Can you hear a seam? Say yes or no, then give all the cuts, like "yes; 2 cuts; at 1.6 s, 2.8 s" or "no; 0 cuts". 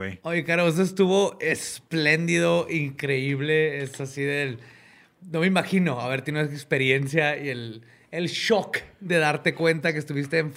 no; 0 cuts